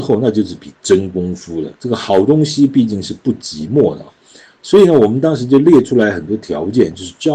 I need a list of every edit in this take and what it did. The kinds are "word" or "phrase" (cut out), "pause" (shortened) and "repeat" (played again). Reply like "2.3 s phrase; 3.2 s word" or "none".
1.8 s pause